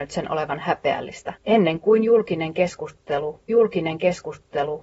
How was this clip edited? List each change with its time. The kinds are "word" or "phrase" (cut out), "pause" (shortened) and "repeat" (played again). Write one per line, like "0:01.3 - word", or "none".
0:01.4 - pause
0:03.5 - repeat